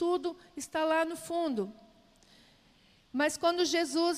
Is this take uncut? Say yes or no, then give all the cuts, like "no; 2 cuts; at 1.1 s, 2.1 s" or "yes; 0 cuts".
yes; 0 cuts